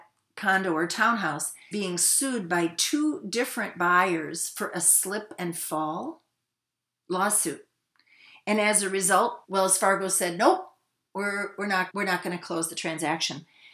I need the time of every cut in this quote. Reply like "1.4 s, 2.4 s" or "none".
1.7 s, 9.4 s, 11.9 s